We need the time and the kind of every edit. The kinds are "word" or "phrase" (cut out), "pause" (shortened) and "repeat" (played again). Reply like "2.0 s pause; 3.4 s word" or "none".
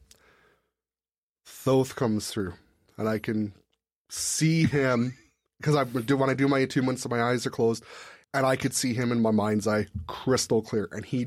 5.5 s pause; 8.2 s pause